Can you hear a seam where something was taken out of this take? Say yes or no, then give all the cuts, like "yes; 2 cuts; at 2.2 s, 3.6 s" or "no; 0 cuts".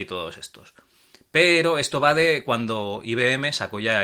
no; 0 cuts